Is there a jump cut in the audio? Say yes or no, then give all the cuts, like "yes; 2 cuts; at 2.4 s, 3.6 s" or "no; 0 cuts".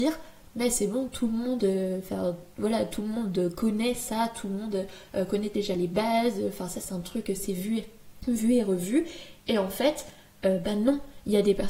no; 0 cuts